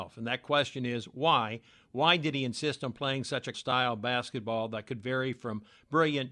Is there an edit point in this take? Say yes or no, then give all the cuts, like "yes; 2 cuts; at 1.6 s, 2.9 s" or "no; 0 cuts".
yes; 1 cut; at 3.5 s